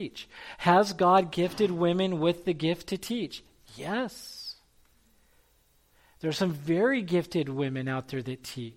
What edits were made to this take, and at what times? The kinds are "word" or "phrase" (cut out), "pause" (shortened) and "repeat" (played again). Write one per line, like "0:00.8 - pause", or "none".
none